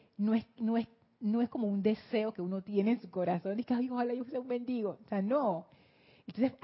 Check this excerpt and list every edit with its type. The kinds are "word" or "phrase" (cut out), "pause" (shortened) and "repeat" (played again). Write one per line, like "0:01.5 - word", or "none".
none